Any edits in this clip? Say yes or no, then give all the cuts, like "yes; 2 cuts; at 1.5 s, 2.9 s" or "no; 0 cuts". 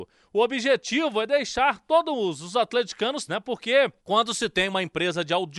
yes; 2 cuts; at 3.3 s, 4.0 s